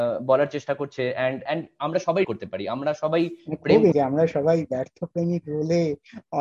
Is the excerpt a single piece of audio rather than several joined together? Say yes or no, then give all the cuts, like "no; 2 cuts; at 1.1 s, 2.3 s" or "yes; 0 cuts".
no; 3 cuts; at 1.5 s, 2.2 s, 3.9 s